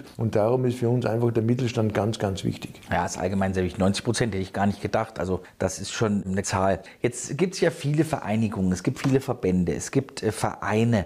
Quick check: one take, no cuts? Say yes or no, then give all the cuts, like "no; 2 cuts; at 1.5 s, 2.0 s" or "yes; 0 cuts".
no; 1 cut; at 6.4 s